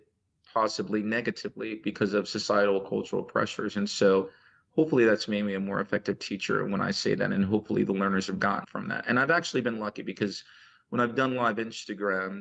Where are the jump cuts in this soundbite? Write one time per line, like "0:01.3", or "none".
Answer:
0:08.6